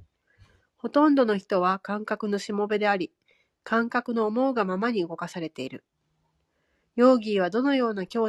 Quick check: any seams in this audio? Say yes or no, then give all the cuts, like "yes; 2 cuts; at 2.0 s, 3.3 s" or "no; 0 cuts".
no; 0 cuts